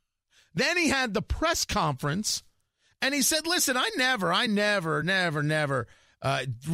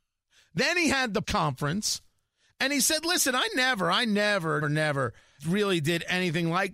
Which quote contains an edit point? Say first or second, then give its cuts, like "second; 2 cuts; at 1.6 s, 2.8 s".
second; 3 cuts; at 1.2 s, 4.6 s, 5.4 s